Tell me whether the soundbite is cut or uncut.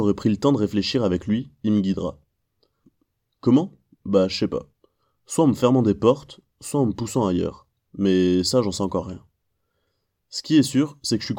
uncut